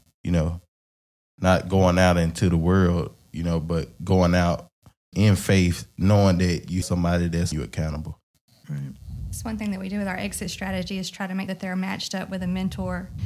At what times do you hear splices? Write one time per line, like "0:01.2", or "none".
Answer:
0:05.1
0:06.8
0:07.5
0:11.5